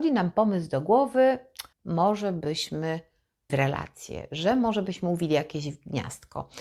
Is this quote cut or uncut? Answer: cut